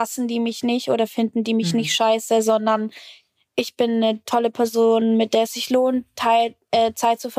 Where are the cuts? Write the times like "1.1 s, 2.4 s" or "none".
none